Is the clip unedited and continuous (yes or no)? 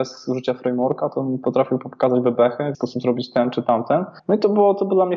no